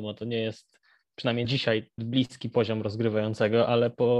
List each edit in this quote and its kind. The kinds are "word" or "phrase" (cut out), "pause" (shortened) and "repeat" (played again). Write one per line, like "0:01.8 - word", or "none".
0:01.4 - word
0:02.0 - word